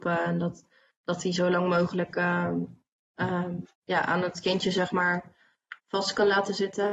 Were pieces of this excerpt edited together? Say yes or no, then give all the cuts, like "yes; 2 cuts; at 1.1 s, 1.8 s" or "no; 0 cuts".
yes; 2 cuts; at 3.7 s, 5.8 s